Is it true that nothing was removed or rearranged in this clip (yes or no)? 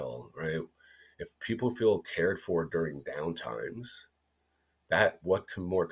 yes